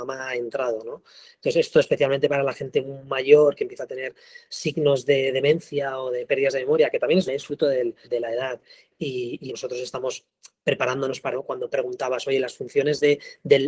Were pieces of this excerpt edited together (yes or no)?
yes